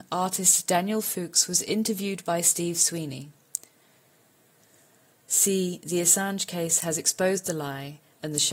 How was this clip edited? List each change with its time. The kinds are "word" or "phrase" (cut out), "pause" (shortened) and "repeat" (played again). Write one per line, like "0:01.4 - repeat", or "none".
none